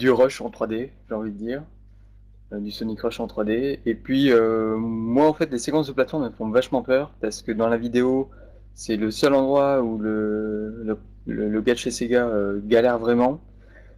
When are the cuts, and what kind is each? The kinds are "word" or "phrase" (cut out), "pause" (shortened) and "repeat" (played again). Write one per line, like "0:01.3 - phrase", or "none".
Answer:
none